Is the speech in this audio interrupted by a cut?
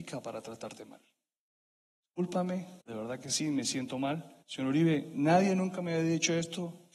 yes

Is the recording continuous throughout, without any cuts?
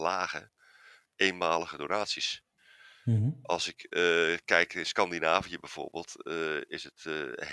yes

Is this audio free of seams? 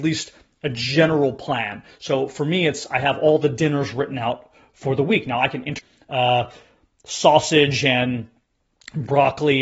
yes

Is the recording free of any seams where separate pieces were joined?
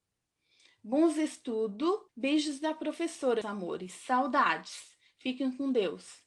no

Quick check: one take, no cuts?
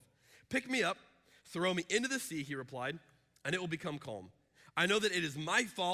yes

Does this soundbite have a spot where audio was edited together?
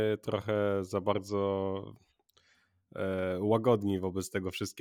no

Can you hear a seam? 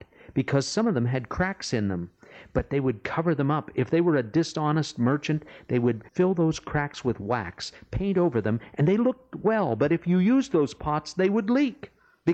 yes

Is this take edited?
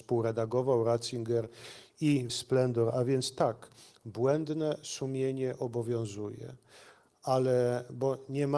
yes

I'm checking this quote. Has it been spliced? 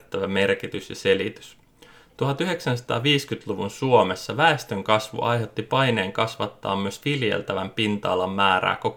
no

